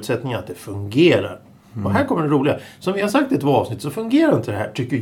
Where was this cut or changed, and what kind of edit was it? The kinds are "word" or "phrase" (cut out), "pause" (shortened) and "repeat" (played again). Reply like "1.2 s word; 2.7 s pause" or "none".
none